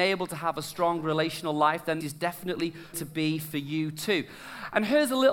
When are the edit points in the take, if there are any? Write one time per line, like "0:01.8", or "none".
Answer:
0:02.0
0:02.9